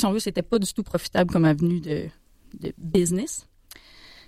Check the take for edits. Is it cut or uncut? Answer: uncut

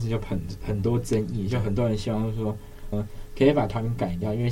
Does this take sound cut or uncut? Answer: cut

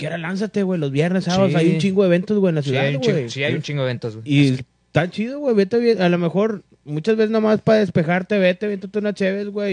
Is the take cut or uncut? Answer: uncut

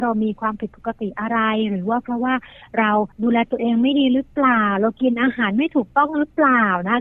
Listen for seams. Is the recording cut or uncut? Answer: cut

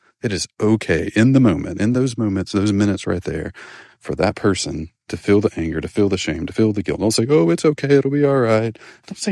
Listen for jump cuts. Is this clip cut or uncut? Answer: uncut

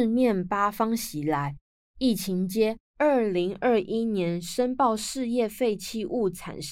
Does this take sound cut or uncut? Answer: uncut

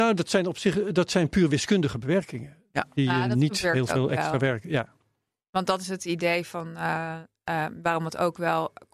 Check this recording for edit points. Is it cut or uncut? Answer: uncut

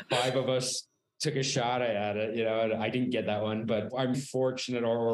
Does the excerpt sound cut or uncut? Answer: cut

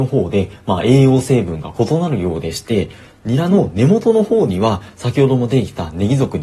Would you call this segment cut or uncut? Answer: uncut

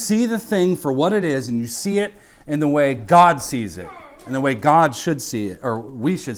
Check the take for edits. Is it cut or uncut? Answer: uncut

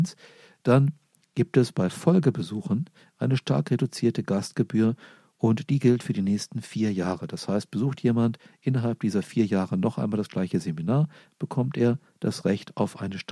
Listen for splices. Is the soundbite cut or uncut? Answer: uncut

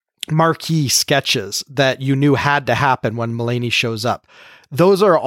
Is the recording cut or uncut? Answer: uncut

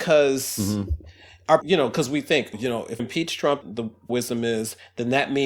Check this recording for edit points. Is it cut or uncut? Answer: cut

